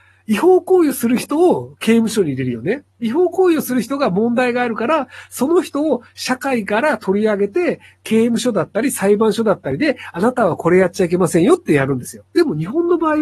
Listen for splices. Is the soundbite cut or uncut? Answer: cut